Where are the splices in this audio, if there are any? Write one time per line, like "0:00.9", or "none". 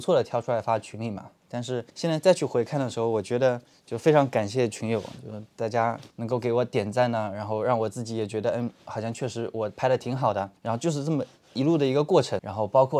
0:01.9
0:03.7
0:06.1
0:10.6